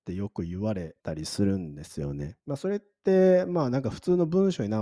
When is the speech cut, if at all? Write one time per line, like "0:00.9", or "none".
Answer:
0:01.0
0:02.4